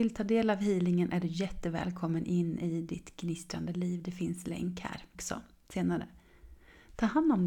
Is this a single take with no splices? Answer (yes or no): no